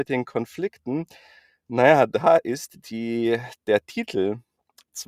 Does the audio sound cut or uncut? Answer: uncut